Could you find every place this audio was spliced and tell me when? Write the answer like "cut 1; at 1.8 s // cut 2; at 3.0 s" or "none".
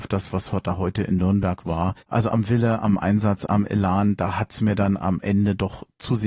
cut 1; at 2.0 s

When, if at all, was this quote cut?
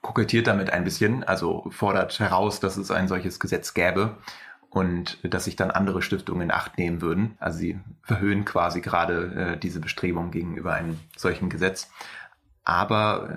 cut 1; at 7.4 s

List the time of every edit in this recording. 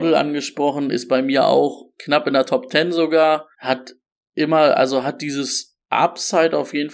cut 1; at 1.9 s // cut 2; at 3.5 s // cut 3; at 5.8 s

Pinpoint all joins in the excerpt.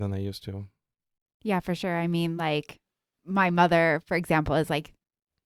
none

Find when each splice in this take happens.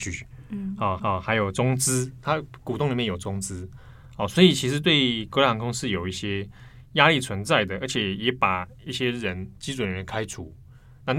cut 1; at 1.0 s

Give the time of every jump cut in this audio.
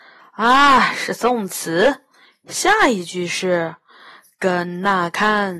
none

